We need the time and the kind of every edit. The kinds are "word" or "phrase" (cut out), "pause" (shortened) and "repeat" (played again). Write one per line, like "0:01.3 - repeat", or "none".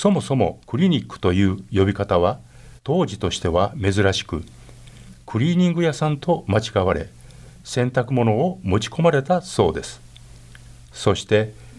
0:02.8 - pause